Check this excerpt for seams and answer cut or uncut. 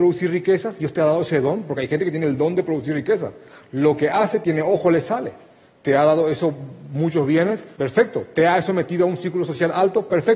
cut